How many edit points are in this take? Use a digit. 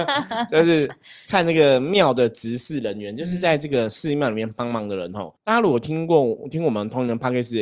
1